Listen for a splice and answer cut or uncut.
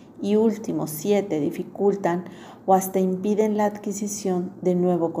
uncut